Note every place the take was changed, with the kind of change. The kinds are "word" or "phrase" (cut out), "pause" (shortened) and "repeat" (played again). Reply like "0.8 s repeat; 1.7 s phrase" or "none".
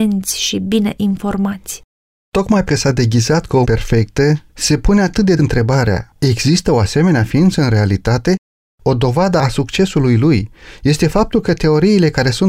2.7 s word; 3.6 s word; 5.4 s word; 8.6 s pause